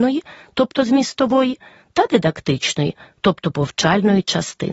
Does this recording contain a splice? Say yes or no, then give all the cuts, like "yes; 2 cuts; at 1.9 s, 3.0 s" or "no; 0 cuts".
no; 0 cuts